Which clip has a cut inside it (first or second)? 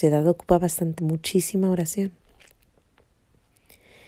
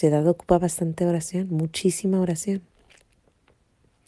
first